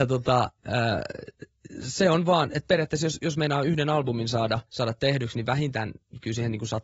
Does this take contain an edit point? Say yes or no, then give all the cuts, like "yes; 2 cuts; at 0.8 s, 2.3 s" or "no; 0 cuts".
yes; 1 cut; at 4.7 s